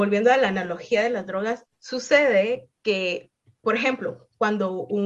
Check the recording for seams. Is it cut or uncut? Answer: uncut